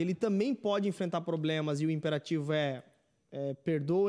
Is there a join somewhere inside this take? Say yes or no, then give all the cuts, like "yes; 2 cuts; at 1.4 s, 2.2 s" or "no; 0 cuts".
no; 0 cuts